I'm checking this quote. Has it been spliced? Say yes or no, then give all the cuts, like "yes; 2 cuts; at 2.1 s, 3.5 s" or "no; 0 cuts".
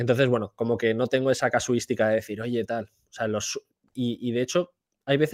no; 0 cuts